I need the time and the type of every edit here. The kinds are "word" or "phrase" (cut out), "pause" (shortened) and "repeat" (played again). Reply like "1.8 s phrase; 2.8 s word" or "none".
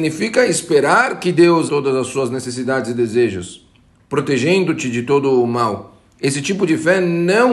1.7 s word